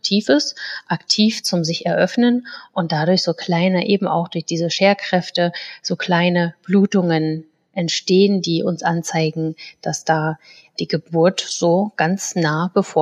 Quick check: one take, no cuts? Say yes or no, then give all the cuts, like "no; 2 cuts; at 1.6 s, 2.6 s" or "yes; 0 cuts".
yes; 0 cuts